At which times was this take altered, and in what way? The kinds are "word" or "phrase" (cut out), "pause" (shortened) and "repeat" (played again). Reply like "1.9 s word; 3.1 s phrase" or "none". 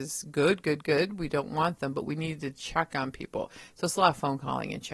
none

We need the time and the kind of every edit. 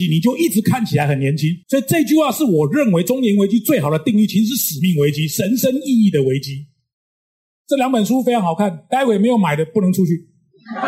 1.6 s pause

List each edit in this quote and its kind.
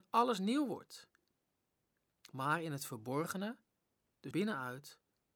4.3 s word

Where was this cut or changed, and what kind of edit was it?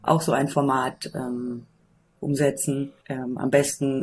3.0 s pause

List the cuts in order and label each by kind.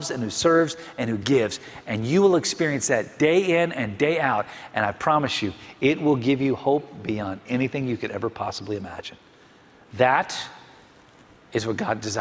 none

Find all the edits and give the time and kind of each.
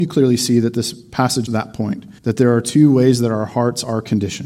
1.5 s word; 2.2 s pause

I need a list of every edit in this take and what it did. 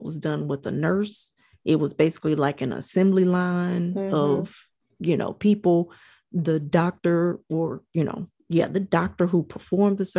none

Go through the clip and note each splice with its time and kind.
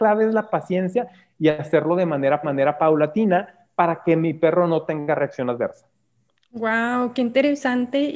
2.4 s repeat

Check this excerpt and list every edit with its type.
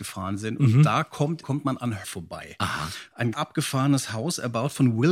1.4 s word; 2.0 s phrase; 3.3 s word

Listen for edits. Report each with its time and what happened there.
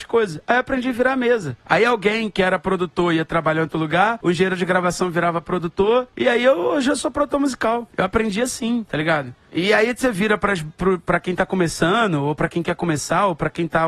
none

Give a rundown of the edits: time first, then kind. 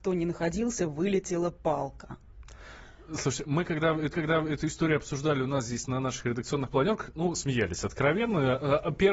4.1 s repeat

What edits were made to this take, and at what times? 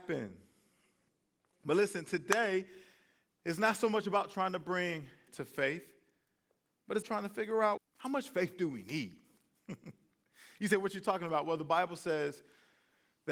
5.3 s word; 7.0 s word; 7.8 s word

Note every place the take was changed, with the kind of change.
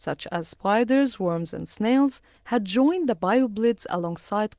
none

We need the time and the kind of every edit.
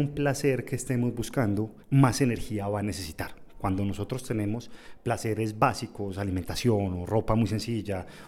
1.8 s pause

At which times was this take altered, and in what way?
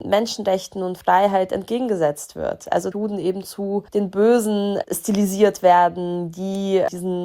2.9 s phrase; 3.9 s pause

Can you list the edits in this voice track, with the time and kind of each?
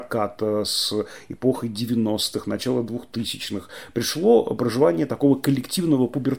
none

